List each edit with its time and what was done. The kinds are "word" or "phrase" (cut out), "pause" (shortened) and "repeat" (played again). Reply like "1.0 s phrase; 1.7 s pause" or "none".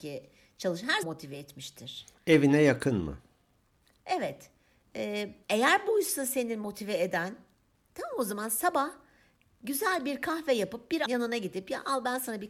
1.0 s word; 5.4 s pause; 11.1 s word